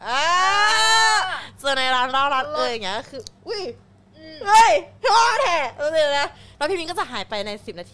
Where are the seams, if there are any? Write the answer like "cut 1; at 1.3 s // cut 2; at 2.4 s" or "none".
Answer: cut 1; at 3.4 s // cut 2; at 5.0 s